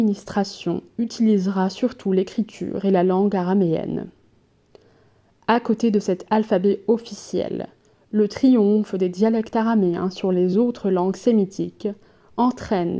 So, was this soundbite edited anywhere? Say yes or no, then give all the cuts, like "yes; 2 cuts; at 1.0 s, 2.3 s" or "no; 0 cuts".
no; 0 cuts